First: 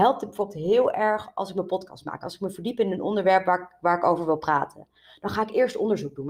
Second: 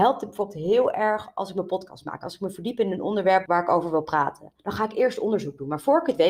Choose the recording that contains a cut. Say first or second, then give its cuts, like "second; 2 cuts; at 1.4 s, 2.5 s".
second; 2 cuts; at 3.5 s, 4.6 s